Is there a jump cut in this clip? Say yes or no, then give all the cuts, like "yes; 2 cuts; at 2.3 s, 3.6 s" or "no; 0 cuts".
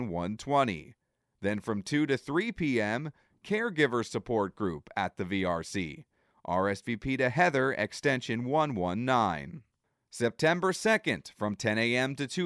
no; 0 cuts